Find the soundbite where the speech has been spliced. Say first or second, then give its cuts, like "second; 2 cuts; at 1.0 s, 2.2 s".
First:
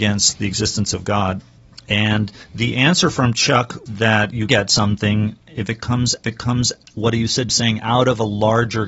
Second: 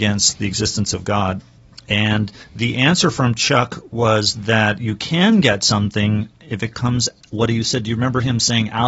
first; 4 cuts; at 3.9 s, 4.5 s, 6.2 s, 7.5 s